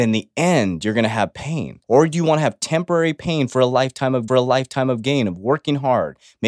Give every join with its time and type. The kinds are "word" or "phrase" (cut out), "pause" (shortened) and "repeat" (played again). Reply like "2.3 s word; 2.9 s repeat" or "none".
1.8 s pause; 4.3 s repeat